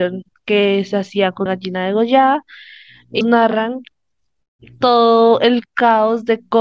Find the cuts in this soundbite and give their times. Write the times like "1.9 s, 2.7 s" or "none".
1.5 s, 3.2 s